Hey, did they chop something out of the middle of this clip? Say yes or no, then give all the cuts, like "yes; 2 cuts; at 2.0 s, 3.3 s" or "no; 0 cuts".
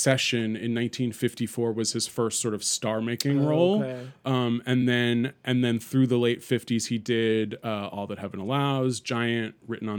no; 0 cuts